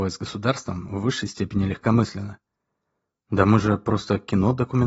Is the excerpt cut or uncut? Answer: uncut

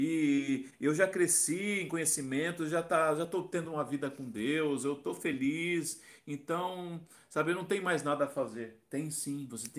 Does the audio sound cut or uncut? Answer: uncut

